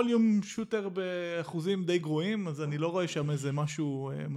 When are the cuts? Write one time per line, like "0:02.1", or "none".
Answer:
none